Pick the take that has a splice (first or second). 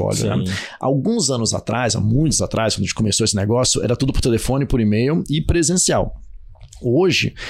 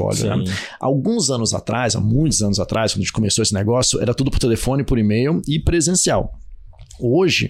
first